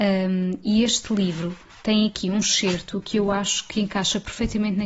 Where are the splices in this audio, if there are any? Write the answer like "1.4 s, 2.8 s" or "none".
none